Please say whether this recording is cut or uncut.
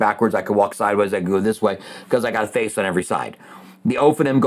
uncut